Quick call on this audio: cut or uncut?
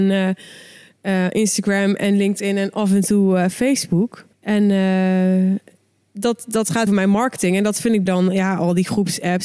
cut